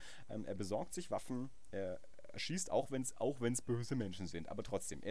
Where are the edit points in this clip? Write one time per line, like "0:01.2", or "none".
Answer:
none